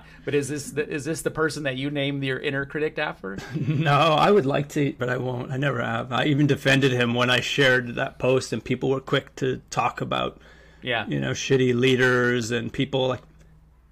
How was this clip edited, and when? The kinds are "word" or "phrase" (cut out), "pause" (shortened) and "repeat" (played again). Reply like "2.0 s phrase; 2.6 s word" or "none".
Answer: 5.0 s phrase